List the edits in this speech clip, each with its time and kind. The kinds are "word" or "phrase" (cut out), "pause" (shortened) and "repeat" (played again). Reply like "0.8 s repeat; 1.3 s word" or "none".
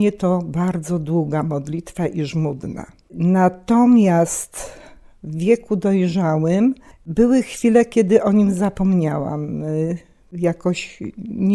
none